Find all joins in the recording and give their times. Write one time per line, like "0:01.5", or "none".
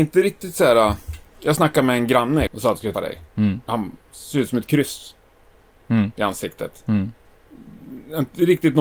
0:02.5
0:02.9